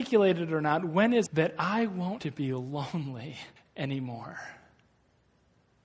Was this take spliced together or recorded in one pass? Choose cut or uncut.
cut